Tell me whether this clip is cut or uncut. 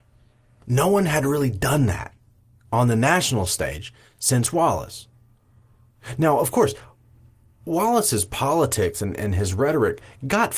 uncut